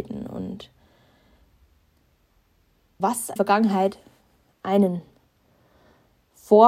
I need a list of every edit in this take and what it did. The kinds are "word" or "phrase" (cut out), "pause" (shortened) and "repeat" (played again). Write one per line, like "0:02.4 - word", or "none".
0:03.0 - word
0:03.4 - word